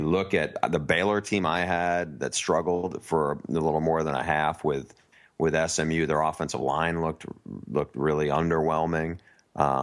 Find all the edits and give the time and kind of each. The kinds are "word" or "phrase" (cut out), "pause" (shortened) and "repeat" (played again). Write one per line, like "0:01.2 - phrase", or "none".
none